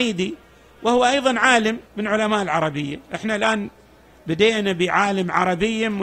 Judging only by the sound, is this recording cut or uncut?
cut